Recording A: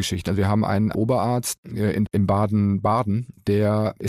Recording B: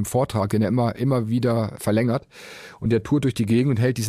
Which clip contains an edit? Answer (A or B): A